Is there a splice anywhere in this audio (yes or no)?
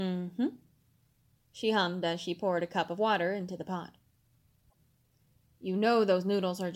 no